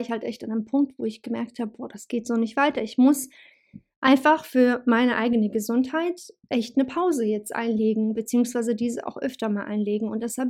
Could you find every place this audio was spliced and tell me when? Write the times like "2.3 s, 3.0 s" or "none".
none